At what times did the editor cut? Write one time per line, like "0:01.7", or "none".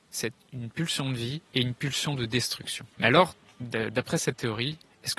0:01.5
0:02.9